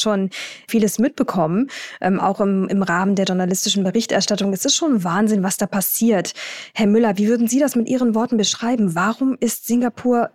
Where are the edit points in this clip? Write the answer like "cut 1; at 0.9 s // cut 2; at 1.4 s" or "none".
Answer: none